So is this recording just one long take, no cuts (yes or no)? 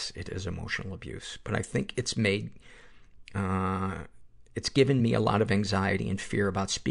yes